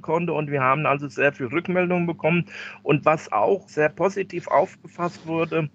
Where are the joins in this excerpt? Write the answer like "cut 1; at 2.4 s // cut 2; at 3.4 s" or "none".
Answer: cut 1; at 3.7 s